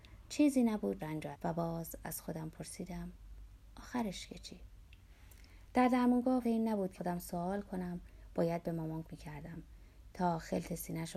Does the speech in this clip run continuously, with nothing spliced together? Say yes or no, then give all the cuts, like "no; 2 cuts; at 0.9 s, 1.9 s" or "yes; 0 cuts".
no; 5 cuts; at 1.0 s, 1.3 s, 6.4 s, 7.0 s, 9.0 s